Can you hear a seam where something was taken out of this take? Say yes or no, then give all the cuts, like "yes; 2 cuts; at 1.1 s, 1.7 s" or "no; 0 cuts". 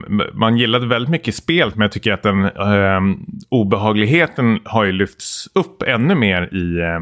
no; 0 cuts